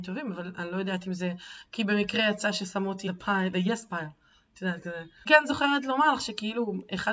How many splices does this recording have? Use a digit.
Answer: 3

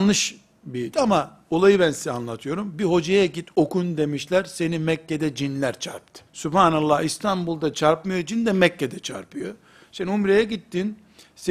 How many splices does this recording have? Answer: 2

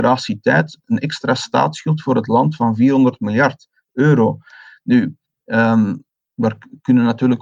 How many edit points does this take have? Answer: 2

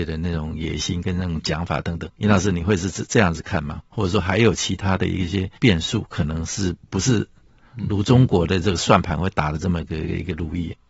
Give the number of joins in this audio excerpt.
3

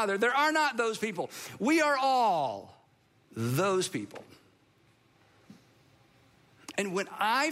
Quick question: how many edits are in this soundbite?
1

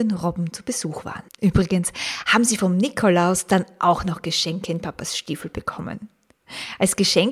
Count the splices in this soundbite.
1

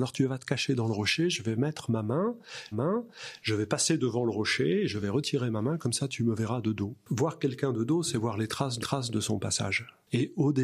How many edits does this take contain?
2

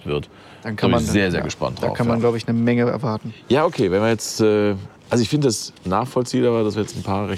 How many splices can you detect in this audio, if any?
2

